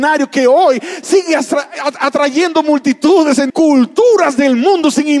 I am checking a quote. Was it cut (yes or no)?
yes